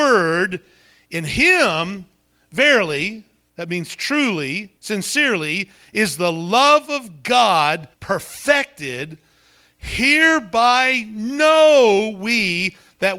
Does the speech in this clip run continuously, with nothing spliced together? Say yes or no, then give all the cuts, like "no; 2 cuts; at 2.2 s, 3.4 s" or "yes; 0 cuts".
no; 2 cuts; at 4.8 s, 7.9 s